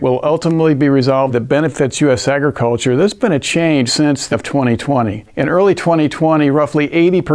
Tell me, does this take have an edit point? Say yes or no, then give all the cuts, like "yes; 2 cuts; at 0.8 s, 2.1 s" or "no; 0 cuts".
yes; 3 cuts; at 1.3 s, 3.9 s, 4.3 s